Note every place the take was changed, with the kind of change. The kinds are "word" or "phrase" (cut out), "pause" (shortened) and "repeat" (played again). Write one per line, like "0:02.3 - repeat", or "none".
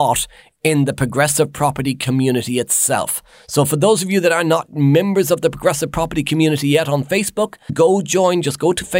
0:07.7 - word